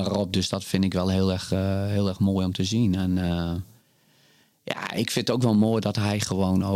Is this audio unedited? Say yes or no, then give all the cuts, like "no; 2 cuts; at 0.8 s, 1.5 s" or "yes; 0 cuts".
yes; 0 cuts